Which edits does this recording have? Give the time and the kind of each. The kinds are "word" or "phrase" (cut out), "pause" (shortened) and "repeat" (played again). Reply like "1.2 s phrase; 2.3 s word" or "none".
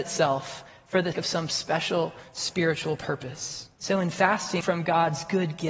1.1 s word; 3.8 s pause; 4.6 s phrase